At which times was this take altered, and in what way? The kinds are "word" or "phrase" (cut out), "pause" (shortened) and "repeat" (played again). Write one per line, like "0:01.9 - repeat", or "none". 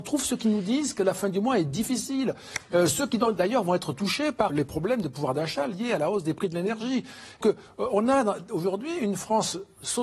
0:04.5 - word
0:07.4 - word